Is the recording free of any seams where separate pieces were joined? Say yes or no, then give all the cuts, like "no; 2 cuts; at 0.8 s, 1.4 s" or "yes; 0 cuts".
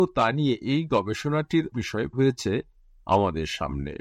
no; 2 cuts; at 1.7 s, 2.1 s